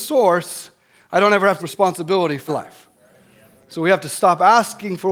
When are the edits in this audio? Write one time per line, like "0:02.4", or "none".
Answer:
0:01.6
0:02.5